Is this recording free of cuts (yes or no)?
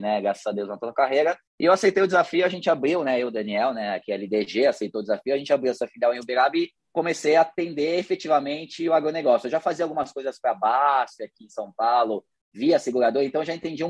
no